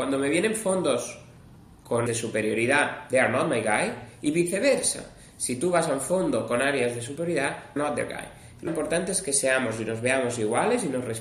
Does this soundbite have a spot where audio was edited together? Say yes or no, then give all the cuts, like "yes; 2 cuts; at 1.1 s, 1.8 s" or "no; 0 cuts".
yes; 3 cuts; at 2.1 s, 7.8 s, 8.7 s